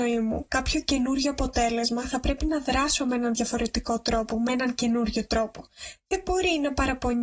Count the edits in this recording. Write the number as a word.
zero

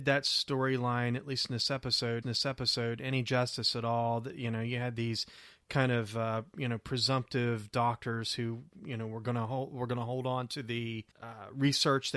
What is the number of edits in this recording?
two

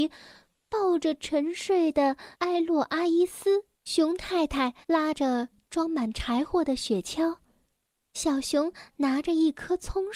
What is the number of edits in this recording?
three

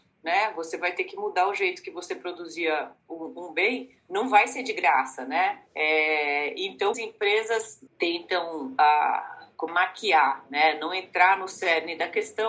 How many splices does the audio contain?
five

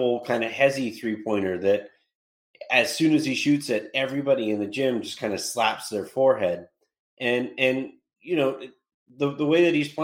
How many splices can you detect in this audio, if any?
zero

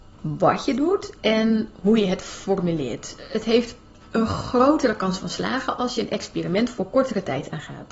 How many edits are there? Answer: zero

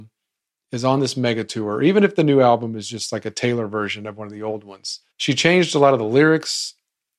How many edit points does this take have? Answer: one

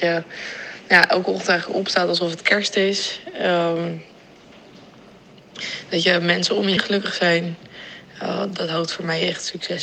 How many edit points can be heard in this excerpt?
one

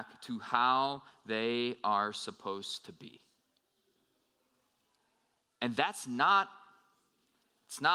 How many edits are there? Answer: zero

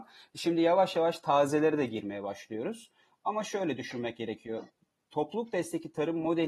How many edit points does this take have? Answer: zero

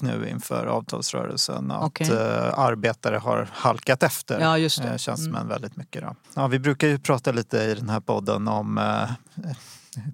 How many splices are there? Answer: one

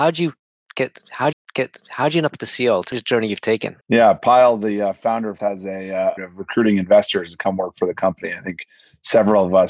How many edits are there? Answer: five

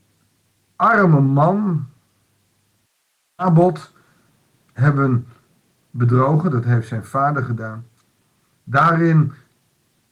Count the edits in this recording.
zero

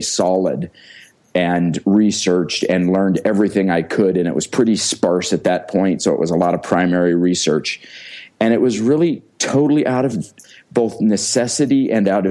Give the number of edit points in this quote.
zero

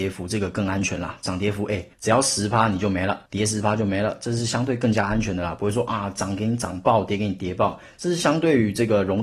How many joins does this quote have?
two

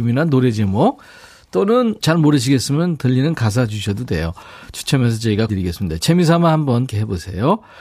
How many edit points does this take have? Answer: three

